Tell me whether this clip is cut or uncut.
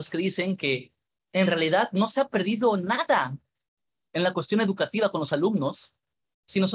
uncut